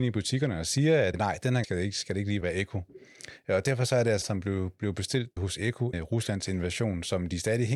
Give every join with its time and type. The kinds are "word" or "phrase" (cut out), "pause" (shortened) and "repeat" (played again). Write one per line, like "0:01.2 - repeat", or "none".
0:01.1 - word
0:01.6 - word
0:02.4 - word
0:04.2 - word
0:05.4 - word
0:05.9 - word